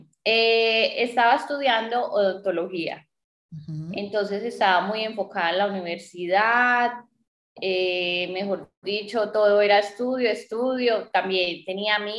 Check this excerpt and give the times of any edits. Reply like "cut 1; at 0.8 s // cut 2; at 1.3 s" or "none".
none